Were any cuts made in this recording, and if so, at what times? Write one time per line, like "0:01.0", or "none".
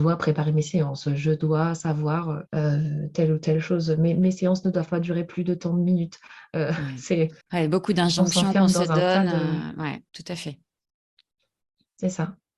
0:02.5
0:07.4
0:10.1